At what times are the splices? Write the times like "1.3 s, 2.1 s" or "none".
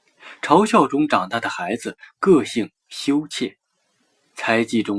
none